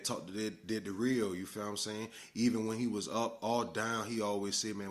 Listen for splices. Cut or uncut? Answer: uncut